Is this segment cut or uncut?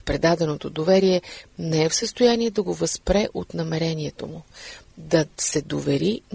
uncut